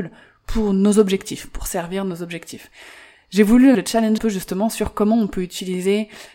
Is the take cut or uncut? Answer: cut